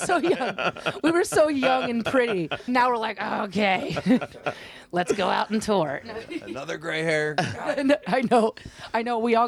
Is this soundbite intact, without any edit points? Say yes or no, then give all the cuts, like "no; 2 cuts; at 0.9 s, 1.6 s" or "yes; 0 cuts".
no; 1 cut; at 2.7 s